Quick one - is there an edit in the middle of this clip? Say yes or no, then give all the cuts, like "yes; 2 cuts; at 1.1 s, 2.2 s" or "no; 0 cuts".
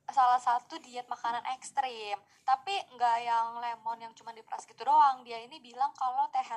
no; 0 cuts